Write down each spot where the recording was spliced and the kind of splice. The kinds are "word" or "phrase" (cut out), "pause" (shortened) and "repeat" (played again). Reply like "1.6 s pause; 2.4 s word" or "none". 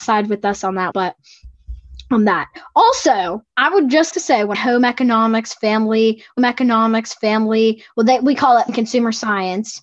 0.9 s word; 3.5 s pause; 4.1 s word; 4.5 s phrase; 6.4 s repeat; 8.7 s word